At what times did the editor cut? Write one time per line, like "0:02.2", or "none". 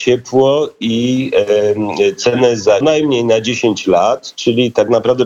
0:02.8